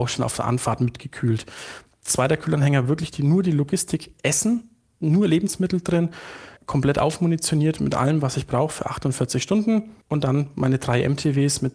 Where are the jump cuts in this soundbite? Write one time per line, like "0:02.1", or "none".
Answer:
0:06.6
0:10.0